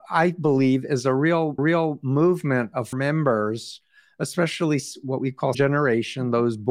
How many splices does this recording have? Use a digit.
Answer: 3